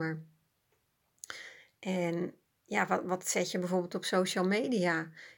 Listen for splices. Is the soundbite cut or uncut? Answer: uncut